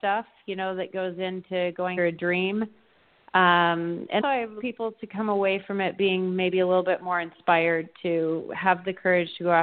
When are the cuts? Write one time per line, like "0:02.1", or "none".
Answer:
0:02.0
0:04.2
0:04.6